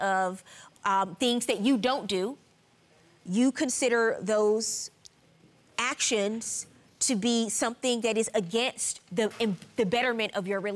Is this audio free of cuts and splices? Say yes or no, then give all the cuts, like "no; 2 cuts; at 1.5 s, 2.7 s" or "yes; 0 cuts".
yes; 0 cuts